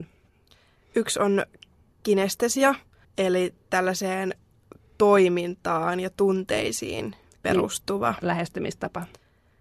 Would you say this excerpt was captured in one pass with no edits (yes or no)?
yes